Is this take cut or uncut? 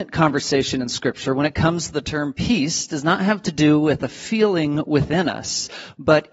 uncut